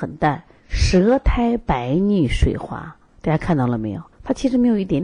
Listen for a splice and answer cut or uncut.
cut